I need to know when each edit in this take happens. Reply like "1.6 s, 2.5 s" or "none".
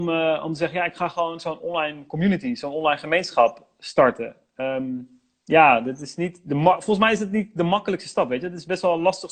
none